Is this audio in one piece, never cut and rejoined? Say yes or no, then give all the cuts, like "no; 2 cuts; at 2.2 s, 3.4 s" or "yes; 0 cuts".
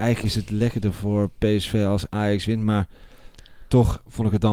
yes; 0 cuts